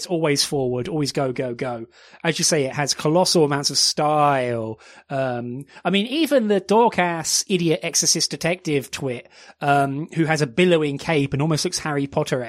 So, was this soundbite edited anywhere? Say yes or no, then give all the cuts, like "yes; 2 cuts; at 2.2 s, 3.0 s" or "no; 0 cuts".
no; 0 cuts